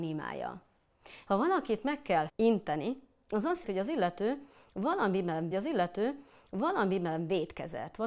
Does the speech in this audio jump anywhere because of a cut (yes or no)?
yes